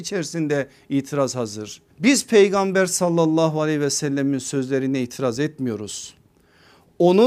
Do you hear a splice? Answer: yes; 1 cut; at 1.9 s

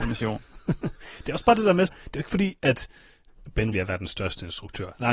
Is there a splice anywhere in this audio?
yes; 2 cuts; at 1.9 s, 3.7 s

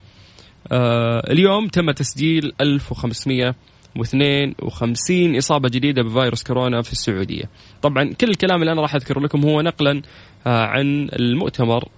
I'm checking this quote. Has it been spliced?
no; 0 cuts

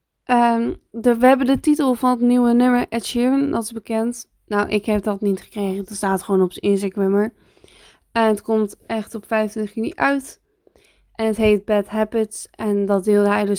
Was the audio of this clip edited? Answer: no; 0 cuts

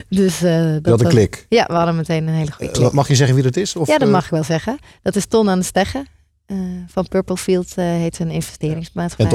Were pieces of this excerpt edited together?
no; 0 cuts

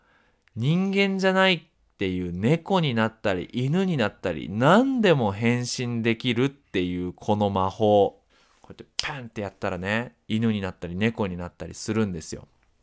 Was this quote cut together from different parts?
yes; 1 cut; at 8.3 s

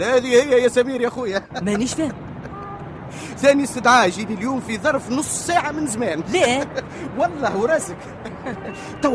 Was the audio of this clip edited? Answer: no; 0 cuts

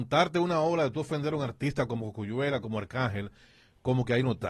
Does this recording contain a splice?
no; 0 cuts

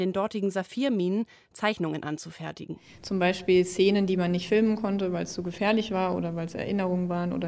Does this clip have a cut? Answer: no; 0 cuts

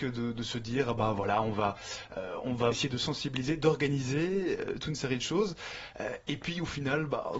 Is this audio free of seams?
no; 1 cut; at 2.7 s

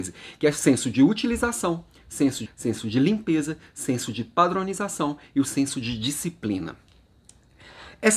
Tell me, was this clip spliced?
yes; 1 cut; at 2.5 s

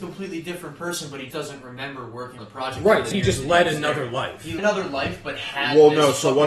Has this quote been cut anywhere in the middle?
yes; 4 cuts; at 1.3 s, 2.4 s, 3.1 s, 4.6 s

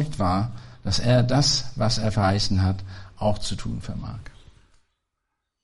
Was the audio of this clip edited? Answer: no; 0 cuts

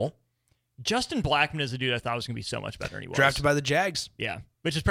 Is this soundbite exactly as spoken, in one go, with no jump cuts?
yes; 0 cuts

